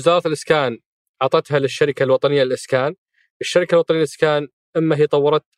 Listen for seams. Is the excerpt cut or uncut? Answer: uncut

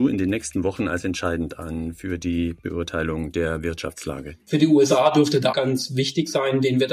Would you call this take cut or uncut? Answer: cut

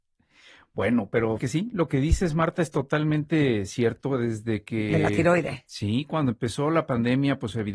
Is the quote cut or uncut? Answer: cut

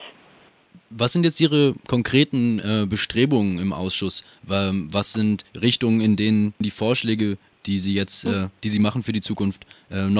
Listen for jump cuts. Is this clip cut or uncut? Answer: uncut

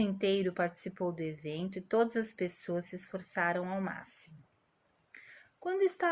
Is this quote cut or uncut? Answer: uncut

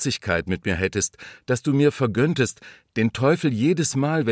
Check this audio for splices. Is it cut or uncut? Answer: uncut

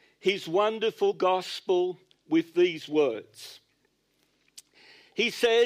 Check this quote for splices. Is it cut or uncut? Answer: uncut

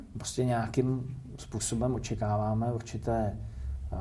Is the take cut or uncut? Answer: uncut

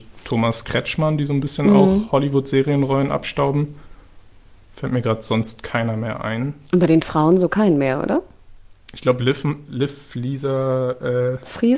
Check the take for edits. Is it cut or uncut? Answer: cut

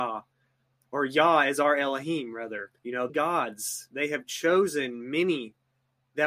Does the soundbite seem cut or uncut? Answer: cut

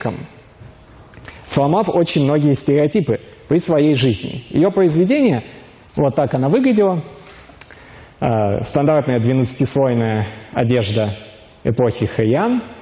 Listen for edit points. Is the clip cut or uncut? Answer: uncut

